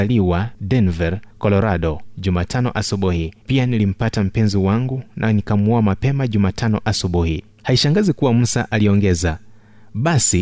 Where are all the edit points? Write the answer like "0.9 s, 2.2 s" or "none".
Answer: 1.3 s, 3.4 s, 7.5 s